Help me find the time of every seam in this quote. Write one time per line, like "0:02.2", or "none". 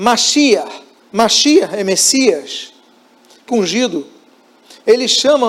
0:01.0
0:03.5

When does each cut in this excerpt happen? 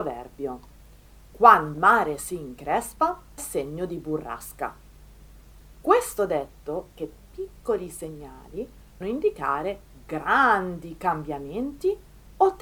0:01.7
0:03.4
0:06.9
0:09.0

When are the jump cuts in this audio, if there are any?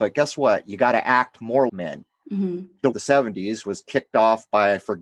0:01.7
0:02.9
0:03.6

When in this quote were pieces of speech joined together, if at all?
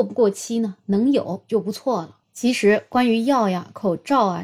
none

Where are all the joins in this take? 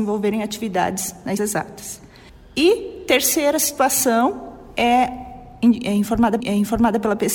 0:01.4
0:02.3
0:06.4

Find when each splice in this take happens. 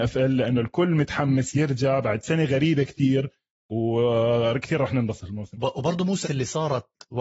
0:05.5
0:06.2

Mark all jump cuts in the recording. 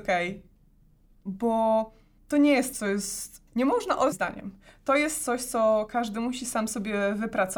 0:02.2
0:02.7
0:03.5
0:04.1

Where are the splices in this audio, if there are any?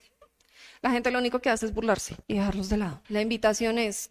0:02.2
0:03.0

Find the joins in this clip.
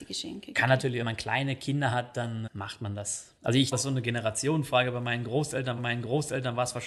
0:01.0
0:02.5
0:03.4
0:03.7
0:05.8

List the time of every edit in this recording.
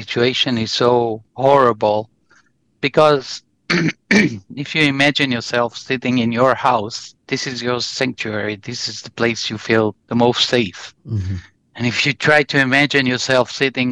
0:01.3
0:07.2
0:10.0
0:11.6

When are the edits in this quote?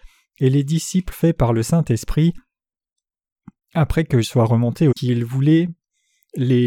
0:01.1
0:04.2
0:04.9

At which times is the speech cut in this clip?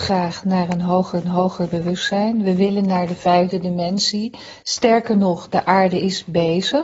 0:01.2

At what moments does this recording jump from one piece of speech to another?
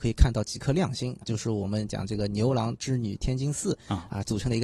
0:01.2

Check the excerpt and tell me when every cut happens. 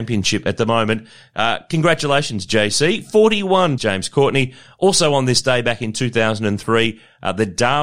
0:03.8

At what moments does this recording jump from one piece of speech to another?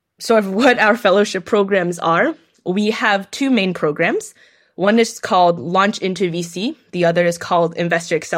none

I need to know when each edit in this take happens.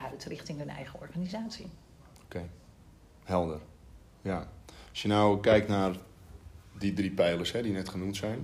none

